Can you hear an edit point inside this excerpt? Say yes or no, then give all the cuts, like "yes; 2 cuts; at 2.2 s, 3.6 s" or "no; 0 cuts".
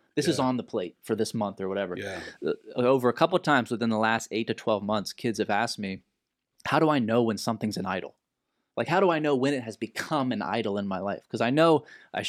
no; 0 cuts